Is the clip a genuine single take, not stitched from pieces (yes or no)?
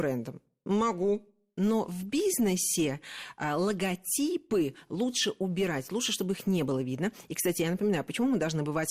yes